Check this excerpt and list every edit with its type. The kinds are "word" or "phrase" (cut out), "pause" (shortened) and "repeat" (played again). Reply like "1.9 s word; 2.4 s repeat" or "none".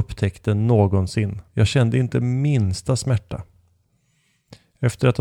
1.5 s pause